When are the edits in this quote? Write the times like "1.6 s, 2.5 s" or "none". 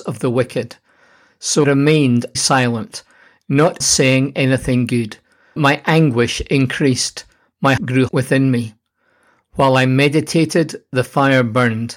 1.6 s, 2.3 s, 3.8 s, 5.6 s, 7.8 s, 8.1 s